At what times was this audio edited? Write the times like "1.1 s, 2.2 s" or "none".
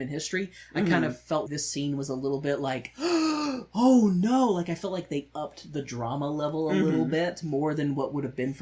1.5 s